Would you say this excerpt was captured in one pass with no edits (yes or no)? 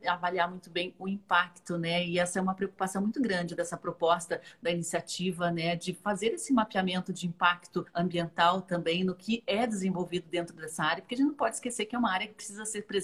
no